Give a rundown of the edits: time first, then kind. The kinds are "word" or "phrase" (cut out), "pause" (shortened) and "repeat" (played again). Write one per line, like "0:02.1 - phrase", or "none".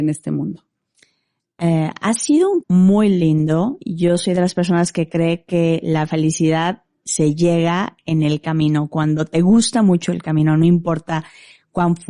0:02.6 - word
0:07.0 - word